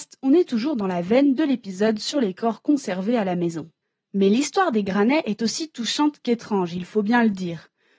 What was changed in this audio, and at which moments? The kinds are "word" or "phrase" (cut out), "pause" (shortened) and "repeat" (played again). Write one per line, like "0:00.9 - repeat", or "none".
0:03.8 - pause